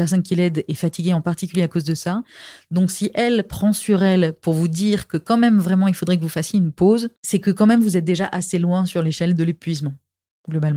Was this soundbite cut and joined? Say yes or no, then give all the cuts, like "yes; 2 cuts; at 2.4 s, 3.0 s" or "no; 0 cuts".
yes; 1 cut; at 7.2 s